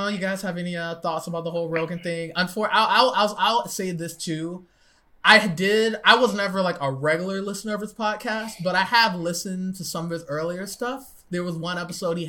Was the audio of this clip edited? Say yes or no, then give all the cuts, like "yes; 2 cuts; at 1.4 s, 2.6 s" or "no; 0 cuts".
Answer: no; 0 cuts